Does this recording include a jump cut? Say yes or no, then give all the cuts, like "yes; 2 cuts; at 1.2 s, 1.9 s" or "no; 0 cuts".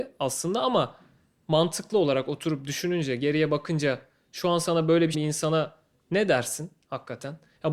yes; 1 cut; at 5.1 s